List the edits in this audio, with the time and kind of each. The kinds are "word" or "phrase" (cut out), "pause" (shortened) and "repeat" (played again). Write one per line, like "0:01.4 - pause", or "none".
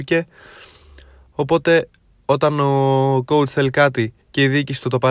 0:04.2 - pause